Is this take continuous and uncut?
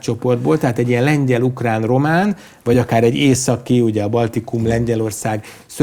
yes; 0 cuts

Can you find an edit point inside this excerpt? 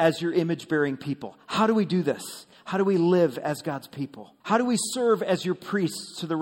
yes; 1 cut; at 4.4 s

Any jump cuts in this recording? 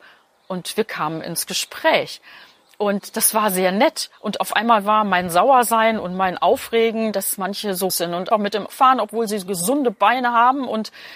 yes; 4 cuts; at 7.1 s, 7.9 s, 8.3 s, 8.7 s

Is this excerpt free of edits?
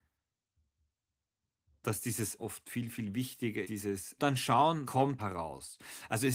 no; 5 cuts; at 2.4 s, 3.6 s, 4.2 s, 4.8 s, 5.2 s

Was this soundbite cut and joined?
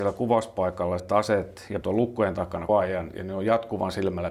yes; 3 cuts; at 1.0 s, 1.8 s, 2.7 s

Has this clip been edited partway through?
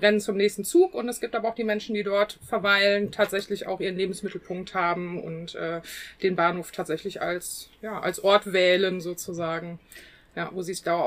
no; 0 cuts

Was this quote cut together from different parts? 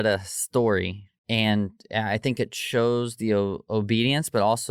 yes; 1 cut; at 1.2 s

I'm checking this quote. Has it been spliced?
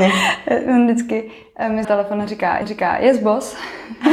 yes; 2 cuts; at 1.8 s, 2.6 s

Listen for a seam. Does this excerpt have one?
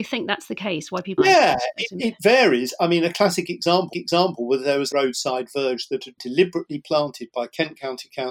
yes; 4 cuts; at 1.2 s, 3.9 s, 4.9 s, 6.2 s

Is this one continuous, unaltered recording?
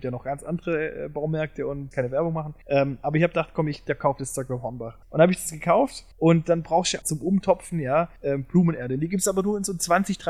no; 6 cuts; at 1.9 s, 2.6 s, 5.0 s, 6.1 s, 7.0 s, 8.2 s

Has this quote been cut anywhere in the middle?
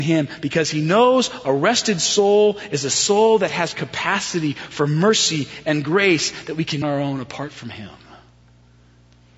yes; 1 cut; at 6.8 s

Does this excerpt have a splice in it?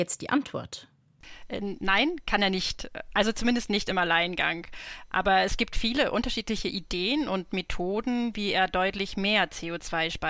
no; 0 cuts

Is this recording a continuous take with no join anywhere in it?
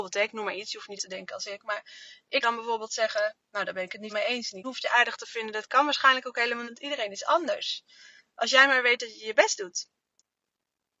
no; 5 cuts; at 1.0 s, 2.4 s, 4.1 s, 4.6 s, 6.6 s

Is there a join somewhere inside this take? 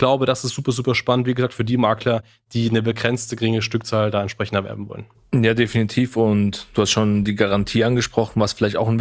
no; 0 cuts

